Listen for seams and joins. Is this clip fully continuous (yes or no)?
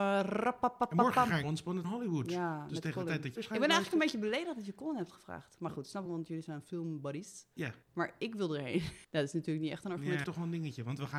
no